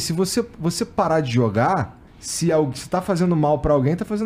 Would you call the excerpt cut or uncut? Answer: cut